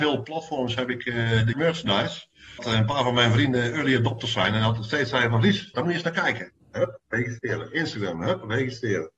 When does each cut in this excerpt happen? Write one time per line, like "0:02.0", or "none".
0:01.5
0:02.6
0:05.7
0:06.6